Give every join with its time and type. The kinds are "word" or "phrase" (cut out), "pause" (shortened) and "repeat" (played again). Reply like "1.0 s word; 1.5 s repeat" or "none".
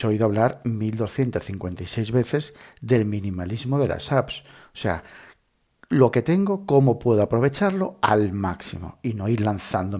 none